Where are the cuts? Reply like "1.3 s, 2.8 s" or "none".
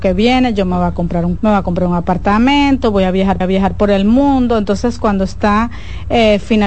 1.4 s, 3.4 s